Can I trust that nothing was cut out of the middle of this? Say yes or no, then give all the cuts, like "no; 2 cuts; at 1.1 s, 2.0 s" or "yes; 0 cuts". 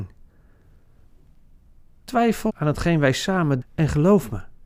no; 2 cuts; at 2.5 s, 3.6 s